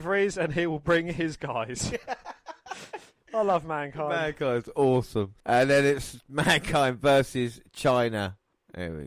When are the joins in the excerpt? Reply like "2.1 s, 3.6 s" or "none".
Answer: 5.4 s